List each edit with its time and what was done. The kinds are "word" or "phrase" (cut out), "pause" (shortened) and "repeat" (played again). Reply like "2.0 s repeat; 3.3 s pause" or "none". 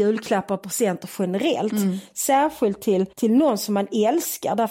3.1 s pause